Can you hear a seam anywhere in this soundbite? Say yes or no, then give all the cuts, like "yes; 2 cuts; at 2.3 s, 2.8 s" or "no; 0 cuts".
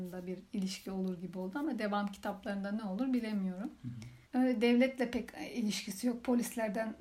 yes; 1 cut; at 4.3 s